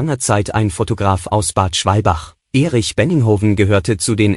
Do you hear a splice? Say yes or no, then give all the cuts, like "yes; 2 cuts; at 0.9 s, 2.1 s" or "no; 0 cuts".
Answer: yes; 1 cut; at 2.4 s